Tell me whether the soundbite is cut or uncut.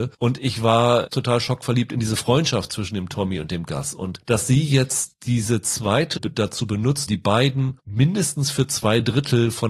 cut